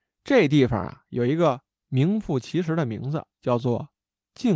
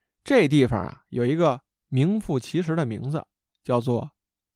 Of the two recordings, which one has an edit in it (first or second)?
first